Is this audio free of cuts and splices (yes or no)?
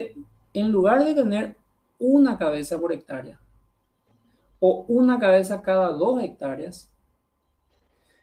yes